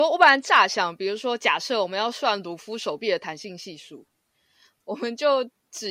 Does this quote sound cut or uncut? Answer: uncut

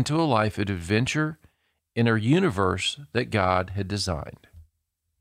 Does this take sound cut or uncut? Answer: uncut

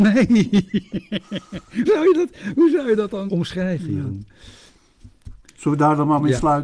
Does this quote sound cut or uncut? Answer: cut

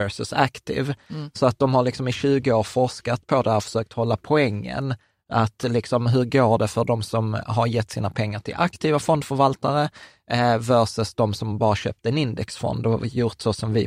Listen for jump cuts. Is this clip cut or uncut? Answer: uncut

